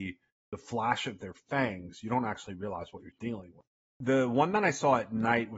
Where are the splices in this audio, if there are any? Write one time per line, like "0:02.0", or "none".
none